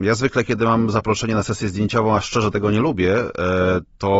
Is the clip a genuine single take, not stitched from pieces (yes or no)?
yes